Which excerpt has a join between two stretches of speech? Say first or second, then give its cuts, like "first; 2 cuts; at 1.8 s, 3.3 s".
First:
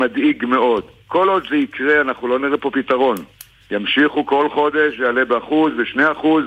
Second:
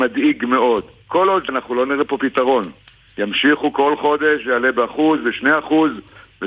second; 1 cut; at 1.5 s